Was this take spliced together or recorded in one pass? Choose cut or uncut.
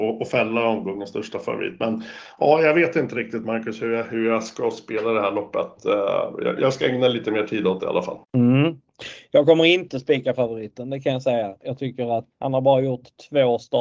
cut